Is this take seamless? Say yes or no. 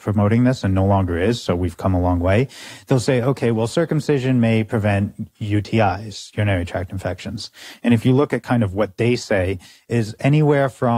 yes